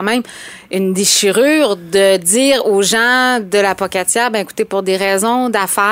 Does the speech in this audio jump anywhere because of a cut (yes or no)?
no